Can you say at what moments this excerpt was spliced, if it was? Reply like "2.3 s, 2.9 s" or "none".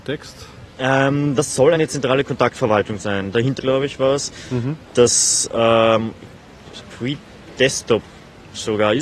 1.7 s, 3.6 s, 6.9 s